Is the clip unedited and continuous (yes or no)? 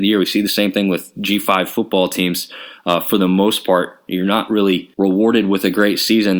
no